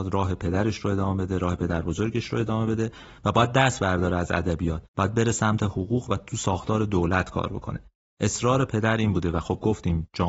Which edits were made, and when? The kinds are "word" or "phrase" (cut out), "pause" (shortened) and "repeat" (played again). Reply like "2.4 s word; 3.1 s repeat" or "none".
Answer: 4.9 s pause

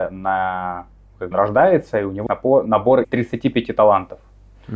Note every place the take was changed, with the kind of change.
1.3 s word; 2.3 s word; 3.0 s word

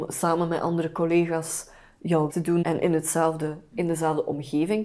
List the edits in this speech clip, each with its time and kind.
2.3 s word; 2.6 s word

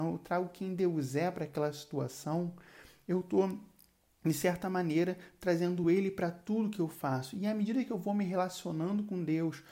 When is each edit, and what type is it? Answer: none

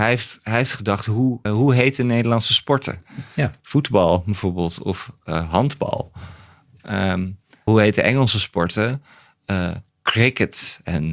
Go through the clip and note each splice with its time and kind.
1.4 s word; 7.7 s word

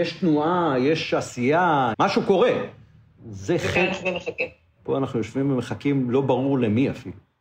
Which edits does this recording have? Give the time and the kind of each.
1.9 s phrase; 4.0 s phrase

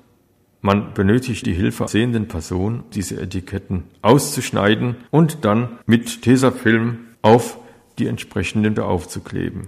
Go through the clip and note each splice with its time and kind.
1.4 s word; 1.9 s word; 2.9 s word; 5.1 s pause; 5.8 s pause; 7.1 s pause; 8.8 s word

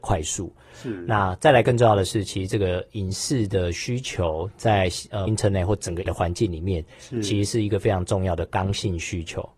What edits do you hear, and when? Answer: 5.3 s word; 6.0 s word

